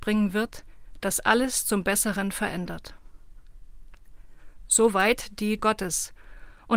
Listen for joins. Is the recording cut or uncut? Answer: cut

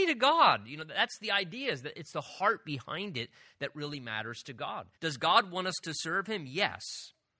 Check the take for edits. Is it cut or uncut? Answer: cut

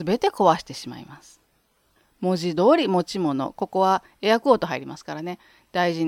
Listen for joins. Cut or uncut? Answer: uncut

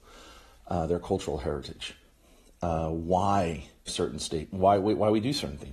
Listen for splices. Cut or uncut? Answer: cut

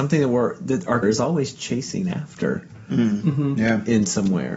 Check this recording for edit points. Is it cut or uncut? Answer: cut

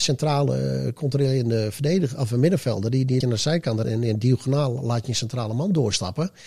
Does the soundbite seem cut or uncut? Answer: cut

